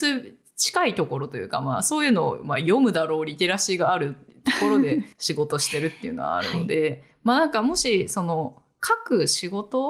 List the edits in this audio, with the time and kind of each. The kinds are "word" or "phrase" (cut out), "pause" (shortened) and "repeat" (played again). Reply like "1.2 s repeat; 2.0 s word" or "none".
5.1 s pause